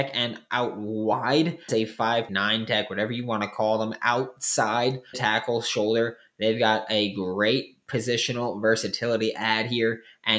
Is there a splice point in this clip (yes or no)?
yes